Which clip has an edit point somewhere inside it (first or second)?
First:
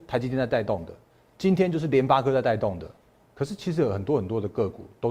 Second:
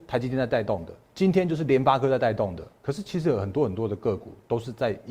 second